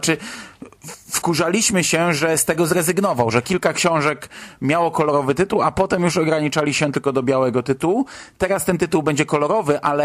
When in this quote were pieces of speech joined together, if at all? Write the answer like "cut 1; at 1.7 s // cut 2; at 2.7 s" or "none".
none